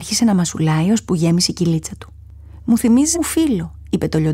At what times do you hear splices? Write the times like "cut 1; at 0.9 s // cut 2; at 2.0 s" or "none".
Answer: cut 1; at 3.1 s